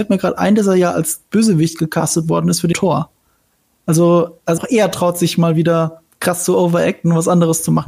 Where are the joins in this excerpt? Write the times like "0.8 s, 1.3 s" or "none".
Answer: 2.7 s, 4.6 s